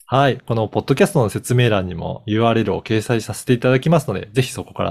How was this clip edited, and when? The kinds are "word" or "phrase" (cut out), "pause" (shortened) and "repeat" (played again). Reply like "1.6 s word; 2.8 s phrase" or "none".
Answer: none